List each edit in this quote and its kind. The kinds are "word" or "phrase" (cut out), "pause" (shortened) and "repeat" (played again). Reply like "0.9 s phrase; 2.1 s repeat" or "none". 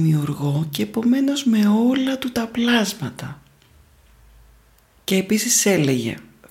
none